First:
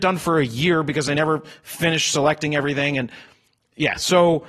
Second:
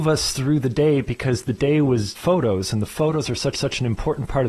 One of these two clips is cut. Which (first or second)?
second